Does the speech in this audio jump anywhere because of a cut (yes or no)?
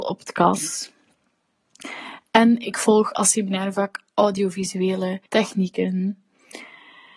yes